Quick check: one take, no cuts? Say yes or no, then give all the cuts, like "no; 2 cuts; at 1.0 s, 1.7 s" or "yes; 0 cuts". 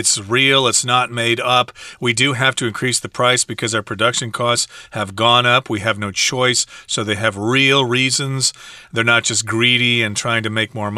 yes; 0 cuts